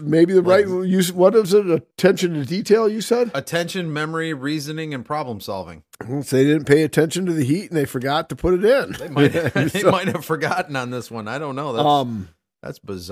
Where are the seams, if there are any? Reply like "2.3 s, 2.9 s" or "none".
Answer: 1.9 s